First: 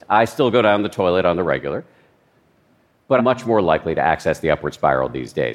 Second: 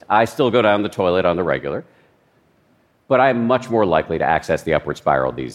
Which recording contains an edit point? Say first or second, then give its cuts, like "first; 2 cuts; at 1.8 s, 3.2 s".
first; 1 cut; at 3.2 s